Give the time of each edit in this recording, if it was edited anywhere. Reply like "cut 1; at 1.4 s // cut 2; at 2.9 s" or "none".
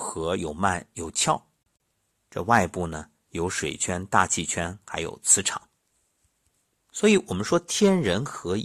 none